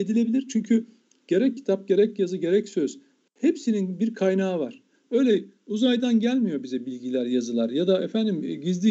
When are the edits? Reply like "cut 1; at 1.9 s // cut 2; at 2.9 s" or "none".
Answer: none